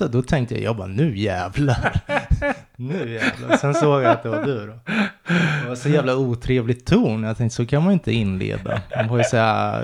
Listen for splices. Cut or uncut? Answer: uncut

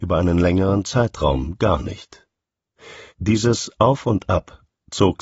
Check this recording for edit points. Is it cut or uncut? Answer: cut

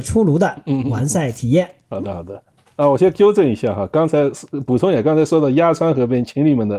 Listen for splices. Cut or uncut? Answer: uncut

